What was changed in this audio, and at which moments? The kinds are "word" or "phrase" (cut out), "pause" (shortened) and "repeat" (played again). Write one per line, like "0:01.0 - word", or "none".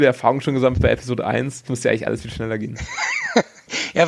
0:01.7 - word